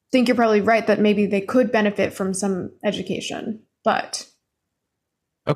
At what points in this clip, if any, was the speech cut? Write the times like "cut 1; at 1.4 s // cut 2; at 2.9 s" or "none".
none

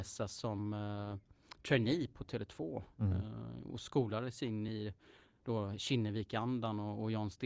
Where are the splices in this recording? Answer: none

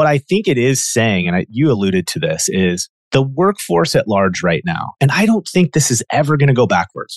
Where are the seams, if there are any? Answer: none

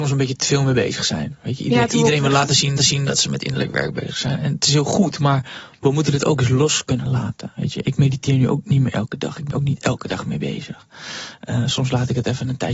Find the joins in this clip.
cut 1; at 2.8 s // cut 2; at 9.5 s

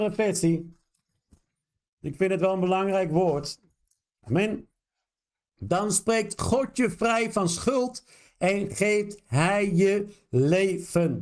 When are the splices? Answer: none

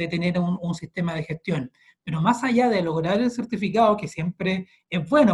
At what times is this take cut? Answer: none

